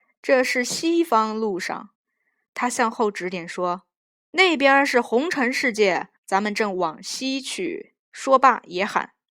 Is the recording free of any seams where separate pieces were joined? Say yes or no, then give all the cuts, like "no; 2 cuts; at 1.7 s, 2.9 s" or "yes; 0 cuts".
no; 3 cuts; at 1.9 s, 6.2 s, 8.0 s